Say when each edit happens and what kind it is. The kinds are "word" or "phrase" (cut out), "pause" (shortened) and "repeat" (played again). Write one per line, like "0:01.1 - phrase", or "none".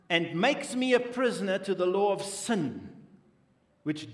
none